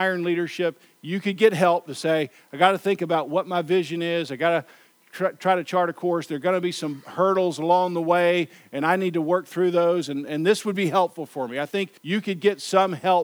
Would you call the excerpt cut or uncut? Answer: cut